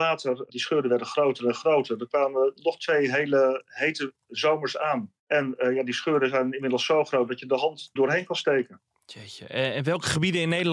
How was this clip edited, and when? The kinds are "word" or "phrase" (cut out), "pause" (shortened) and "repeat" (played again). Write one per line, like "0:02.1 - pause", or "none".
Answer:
0:05.2 - pause
0:08.0 - word